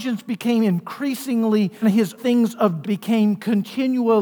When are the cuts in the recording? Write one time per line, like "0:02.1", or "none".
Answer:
0:01.8
0:02.2
0:02.8